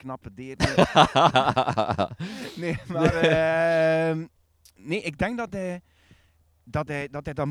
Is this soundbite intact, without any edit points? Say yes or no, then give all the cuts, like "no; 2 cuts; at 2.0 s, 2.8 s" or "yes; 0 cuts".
yes; 0 cuts